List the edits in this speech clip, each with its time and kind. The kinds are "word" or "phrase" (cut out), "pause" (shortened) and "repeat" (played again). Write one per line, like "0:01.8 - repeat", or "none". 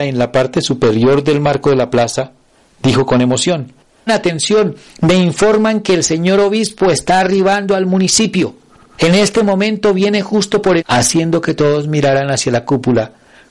0:04.1 - word
0:10.8 - phrase